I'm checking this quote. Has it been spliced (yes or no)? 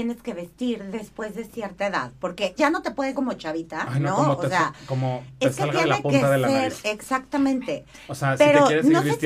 yes